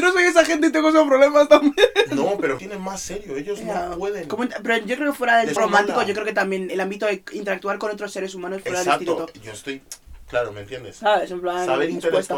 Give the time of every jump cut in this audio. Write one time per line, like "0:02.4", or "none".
0:02.6
0:05.6
0:06.7